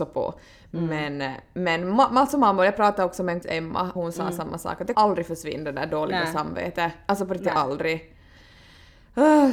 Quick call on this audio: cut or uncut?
cut